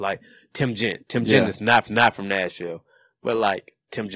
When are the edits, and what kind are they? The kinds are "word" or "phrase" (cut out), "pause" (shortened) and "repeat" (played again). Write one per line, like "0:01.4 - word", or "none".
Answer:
0:01.9 - repeat